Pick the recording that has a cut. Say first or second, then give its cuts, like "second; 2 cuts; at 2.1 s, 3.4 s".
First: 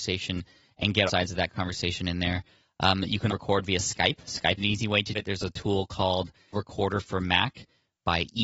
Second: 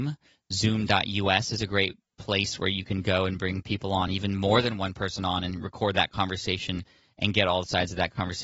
first; 5 cuts; at 1.1 s, 3.3 s, 4.6 s, 5.1 s, 6.5 s